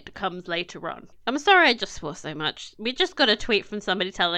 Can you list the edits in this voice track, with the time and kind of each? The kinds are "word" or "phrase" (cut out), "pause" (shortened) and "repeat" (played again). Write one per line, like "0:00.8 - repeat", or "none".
none